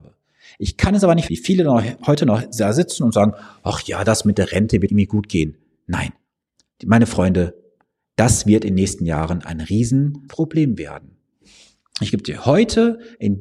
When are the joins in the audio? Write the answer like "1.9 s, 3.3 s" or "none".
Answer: 1.3 s, 4.9 s, 10.3 s